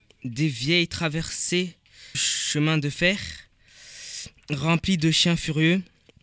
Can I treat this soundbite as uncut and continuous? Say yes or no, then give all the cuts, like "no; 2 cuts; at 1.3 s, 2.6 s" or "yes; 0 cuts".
no; 1 cut; at 2.1 s